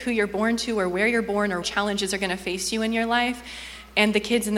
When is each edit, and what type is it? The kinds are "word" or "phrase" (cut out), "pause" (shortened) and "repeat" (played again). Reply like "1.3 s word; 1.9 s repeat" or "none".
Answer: 1.6 s word